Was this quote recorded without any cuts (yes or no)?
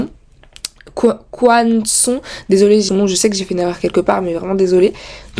no